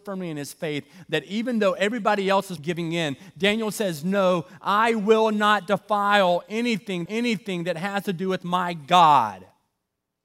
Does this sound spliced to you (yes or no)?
yes